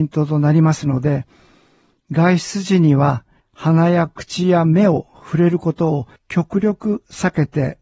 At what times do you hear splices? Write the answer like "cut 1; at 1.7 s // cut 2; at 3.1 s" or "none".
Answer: cut 1; at 3.4 s // cut 2; at 6.2 s

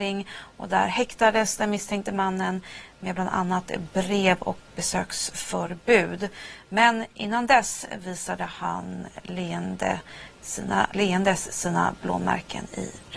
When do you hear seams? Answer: cut 1; at 4.7 s // cut 2; at 10.9 s

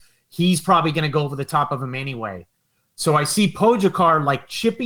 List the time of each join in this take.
none

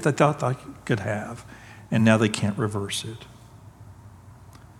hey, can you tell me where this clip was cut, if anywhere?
none

